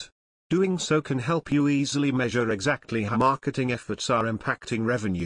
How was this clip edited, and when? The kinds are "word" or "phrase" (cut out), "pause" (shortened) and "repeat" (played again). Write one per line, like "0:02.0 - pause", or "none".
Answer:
0:03.1 - word